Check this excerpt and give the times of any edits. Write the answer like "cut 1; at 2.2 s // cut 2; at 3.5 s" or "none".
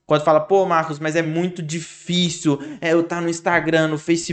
none